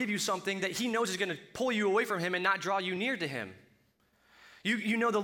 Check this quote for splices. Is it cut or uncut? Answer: uncut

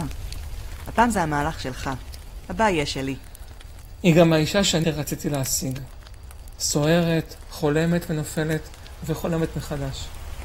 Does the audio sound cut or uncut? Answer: cut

